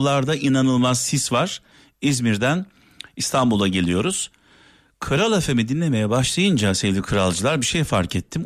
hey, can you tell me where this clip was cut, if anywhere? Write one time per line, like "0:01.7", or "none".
none